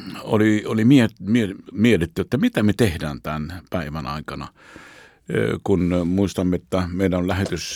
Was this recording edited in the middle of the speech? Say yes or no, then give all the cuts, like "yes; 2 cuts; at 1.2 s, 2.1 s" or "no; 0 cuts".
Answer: no; 0 cuts